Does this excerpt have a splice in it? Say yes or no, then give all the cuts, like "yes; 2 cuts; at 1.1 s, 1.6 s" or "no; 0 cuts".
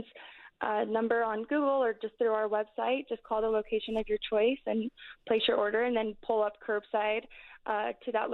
no; 0 cuts